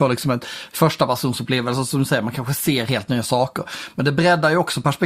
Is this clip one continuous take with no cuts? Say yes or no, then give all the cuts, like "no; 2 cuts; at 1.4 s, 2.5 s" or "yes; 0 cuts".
yes; 0 cuts